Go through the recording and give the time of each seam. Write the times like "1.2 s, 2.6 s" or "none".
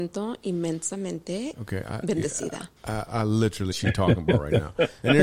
2.8 s, 3.7 s